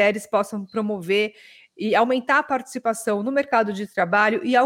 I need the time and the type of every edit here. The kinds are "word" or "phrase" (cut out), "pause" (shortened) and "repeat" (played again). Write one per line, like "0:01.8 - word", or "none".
none